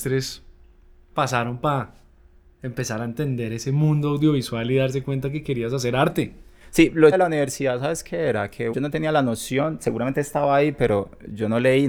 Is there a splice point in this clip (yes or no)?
yes